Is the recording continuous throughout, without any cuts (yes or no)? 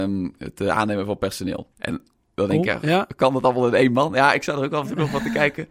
no